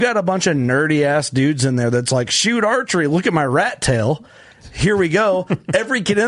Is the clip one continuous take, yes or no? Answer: yes